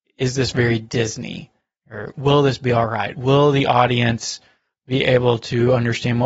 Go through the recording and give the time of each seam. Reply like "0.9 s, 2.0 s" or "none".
none